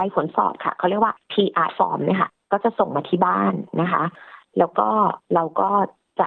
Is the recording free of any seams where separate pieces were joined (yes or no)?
no